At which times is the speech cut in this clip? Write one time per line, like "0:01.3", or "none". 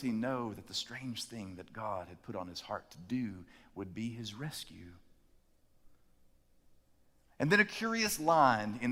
none